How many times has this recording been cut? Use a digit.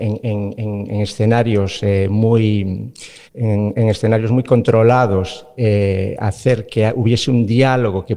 1